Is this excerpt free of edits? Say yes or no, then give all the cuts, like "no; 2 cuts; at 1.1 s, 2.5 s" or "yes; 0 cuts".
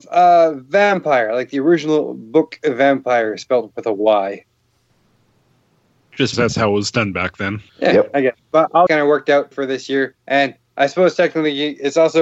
no; 6 cuts; at 6.3 s, 7.7 s, 8.4 s, 8.9 s, 9.5 s, 10.2 s